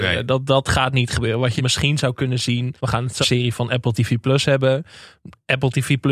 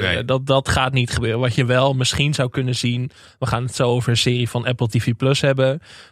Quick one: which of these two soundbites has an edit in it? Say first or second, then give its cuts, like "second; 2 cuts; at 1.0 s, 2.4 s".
first; 3 cuts; at 1.6 s, 2.8 s, 3.2 s